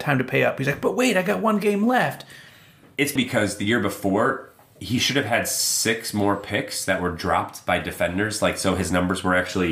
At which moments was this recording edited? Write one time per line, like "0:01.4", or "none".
0:03.2